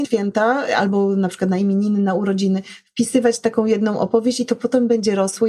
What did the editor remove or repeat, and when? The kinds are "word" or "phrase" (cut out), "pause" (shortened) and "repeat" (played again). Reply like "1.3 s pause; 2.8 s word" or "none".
none